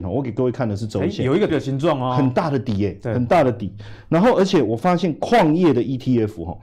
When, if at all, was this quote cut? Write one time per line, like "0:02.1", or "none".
0:01.5